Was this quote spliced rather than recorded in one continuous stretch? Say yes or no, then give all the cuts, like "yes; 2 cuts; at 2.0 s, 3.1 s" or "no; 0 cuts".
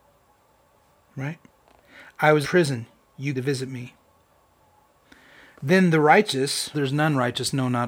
yes; 3 cuts; at 2.4 s, 3.3 s, 6.7 s